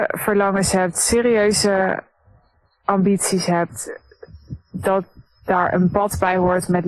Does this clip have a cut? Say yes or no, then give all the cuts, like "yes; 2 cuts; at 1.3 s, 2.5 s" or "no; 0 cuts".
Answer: no; 0 cuts